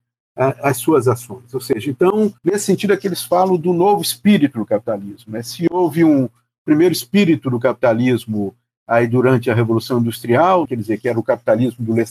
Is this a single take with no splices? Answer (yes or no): no